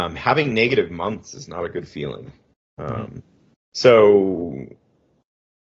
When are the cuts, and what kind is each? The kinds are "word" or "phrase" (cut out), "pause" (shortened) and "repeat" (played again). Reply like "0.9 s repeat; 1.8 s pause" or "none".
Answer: 2.5 s pause; 3.5 s pause